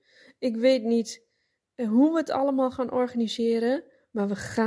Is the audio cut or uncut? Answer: uncut